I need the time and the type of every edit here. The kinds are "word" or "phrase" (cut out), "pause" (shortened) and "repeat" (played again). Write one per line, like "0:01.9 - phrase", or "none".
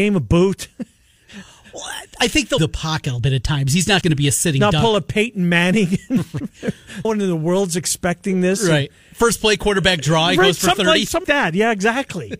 0:02.6 - word
0:03.2 - word
0:04.0 - word
0:07.0 - word
0:11.2 - word